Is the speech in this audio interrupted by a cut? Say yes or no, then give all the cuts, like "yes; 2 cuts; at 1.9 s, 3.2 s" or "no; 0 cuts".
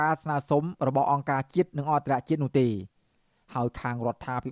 no; 0 cuts